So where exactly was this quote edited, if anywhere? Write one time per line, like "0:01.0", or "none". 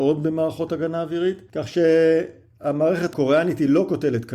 none